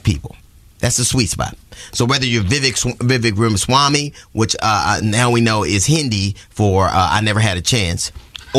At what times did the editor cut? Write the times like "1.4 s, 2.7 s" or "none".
none